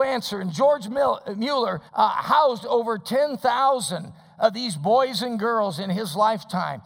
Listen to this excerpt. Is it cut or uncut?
cut